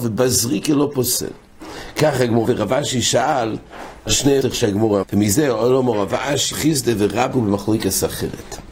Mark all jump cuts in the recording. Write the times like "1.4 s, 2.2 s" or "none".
2.4 s, 4.1 s, 4.4 s, 5.0 s, 6.5 s, 7.3 s